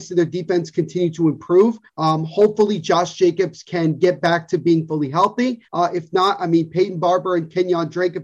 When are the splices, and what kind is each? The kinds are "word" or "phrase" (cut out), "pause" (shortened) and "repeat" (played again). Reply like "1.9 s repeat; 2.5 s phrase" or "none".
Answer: 1.9 s pause; 5.7 s pause